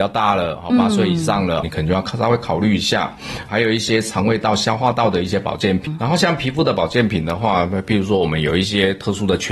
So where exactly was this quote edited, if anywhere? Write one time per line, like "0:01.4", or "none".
0:01.6
0:03.5